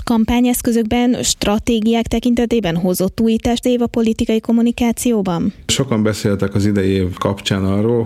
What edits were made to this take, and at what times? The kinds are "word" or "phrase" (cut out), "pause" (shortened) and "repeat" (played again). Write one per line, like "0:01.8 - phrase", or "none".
0:03.6 - phrase